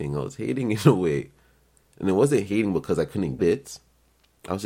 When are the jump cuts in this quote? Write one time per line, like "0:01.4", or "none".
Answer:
0:03.4

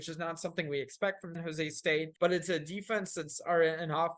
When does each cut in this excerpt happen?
0:01.3
0:02.2

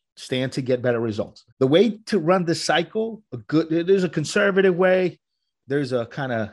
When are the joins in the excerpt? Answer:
0:01.5

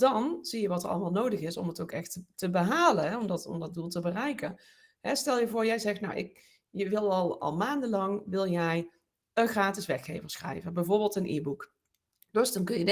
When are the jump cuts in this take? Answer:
none

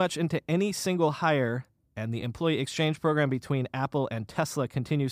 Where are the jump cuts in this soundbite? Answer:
none

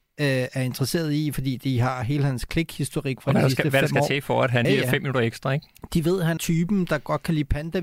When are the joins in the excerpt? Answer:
0:04.6
0:06.4

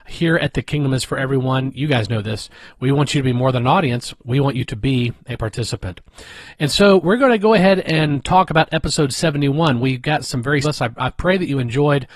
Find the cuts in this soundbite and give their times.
0:04.2
0:10.6

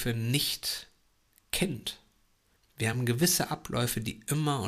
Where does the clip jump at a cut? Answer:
none

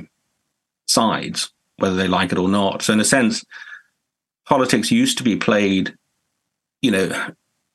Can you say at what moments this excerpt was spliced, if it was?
none

